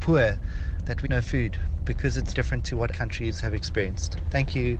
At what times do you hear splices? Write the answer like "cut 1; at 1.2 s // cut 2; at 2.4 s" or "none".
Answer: cut 1; at 1.0 s // cut 2; at 2.3 s // cut 3; at 2.9 s